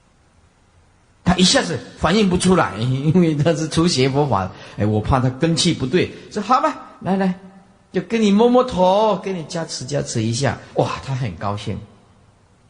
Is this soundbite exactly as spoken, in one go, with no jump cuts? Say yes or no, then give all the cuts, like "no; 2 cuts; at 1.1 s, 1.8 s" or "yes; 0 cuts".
no; 1 cut; at 7.0 s